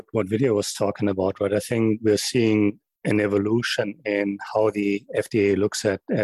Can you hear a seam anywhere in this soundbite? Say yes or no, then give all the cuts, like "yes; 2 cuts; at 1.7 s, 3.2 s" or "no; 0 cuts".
no; 0 cuts